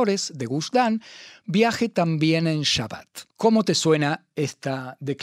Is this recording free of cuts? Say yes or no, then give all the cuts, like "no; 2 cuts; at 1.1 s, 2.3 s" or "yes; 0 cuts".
no; 1 cut; at 3.3 s